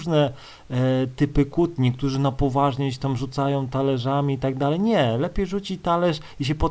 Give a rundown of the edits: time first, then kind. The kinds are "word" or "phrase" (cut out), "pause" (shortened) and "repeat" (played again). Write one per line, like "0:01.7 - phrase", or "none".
none